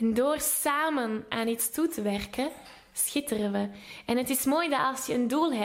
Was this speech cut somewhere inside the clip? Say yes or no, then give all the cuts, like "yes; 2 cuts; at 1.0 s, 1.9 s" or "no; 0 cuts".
no; 0 cuts